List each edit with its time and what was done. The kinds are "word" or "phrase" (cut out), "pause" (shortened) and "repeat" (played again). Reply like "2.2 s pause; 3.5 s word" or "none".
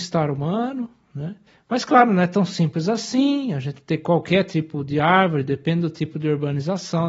1.5 s pause